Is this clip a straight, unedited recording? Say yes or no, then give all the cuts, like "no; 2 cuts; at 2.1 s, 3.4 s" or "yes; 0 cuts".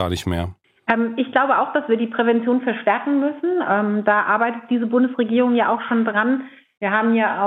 yes; 0 cuts